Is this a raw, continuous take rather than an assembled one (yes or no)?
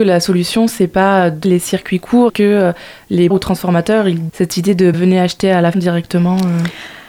no